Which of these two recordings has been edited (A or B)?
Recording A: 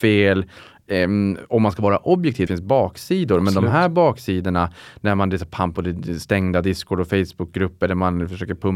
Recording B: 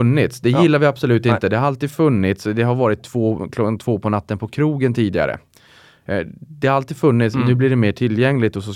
A